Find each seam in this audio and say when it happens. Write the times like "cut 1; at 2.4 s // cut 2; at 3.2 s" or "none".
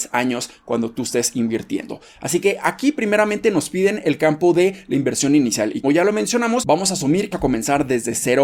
cut 1; at 5.8 s // cut 2; at 7.3 s